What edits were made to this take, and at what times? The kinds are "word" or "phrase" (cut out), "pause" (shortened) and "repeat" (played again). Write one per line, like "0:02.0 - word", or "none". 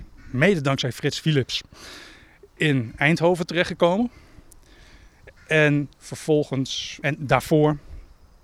0:07.0 - word